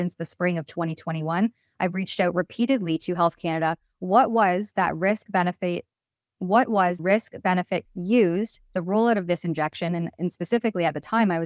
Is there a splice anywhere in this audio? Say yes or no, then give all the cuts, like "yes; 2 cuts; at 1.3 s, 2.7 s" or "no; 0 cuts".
yes; 3 cuts; at 7.0 s, 7.8 s, 8.7 s